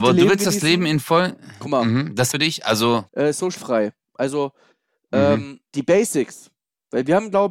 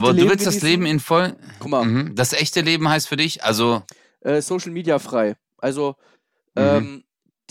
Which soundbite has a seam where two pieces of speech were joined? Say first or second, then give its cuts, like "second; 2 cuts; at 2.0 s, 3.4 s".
first; 4 cuts; at 2.3 s, 3.1 s, 3.6 s, 5.7 s